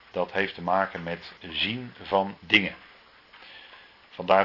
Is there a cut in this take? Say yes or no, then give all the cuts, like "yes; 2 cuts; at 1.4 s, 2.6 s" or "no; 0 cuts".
yes; 2 cuts; at 1.4 s, 2.4 s